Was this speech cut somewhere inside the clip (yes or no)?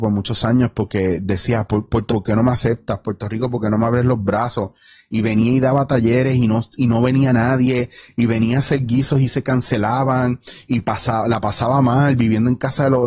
yes